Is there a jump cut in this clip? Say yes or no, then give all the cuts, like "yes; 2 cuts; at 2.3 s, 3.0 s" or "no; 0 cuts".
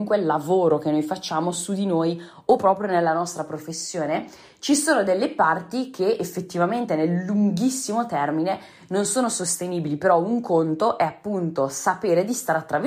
no; 0 cuts